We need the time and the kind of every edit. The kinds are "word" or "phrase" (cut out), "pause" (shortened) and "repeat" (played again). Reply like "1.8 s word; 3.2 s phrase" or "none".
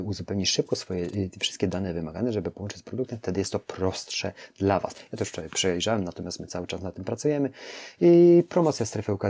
none